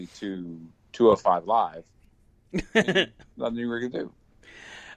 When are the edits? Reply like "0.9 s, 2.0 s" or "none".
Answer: none